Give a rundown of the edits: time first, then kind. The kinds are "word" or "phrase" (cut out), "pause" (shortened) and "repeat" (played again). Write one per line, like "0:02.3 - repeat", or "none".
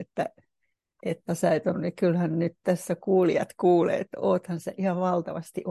0:01.3 - word
0:01.7 - phrase